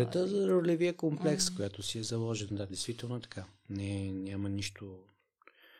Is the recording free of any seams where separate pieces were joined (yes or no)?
yes